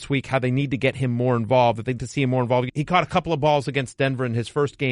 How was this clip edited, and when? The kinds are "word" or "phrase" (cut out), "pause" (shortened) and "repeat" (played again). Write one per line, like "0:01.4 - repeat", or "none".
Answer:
0:02.0 - word
0:02.7 - phrase